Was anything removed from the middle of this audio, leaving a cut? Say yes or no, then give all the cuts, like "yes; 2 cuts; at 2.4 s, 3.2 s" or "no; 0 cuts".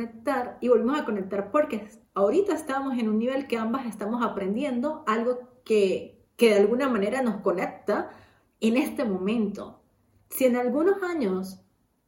no; 0 cuts